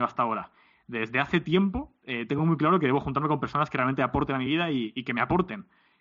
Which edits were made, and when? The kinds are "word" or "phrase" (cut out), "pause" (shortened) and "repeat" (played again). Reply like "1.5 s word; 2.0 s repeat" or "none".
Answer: none